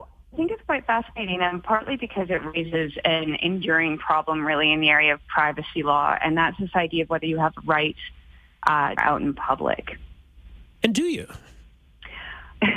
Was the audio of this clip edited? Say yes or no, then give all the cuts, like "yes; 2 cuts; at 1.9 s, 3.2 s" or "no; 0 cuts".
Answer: yes; 2 cuts; at 9.0 s, 10.7 s